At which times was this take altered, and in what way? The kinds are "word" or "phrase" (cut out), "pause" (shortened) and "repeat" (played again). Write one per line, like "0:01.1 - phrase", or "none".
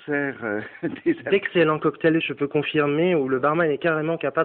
none

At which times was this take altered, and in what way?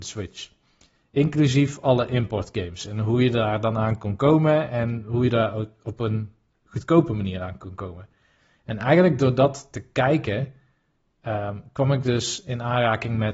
none

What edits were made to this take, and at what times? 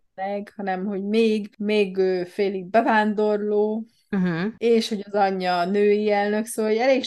none

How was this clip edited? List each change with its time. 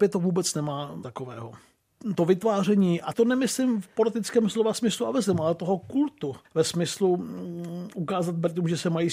0:01.0 - phrase
0:03.1 - word
0:06.4 - pause

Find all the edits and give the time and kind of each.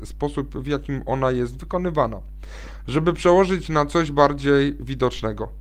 none

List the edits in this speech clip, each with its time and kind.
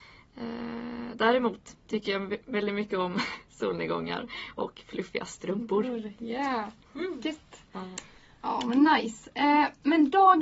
none

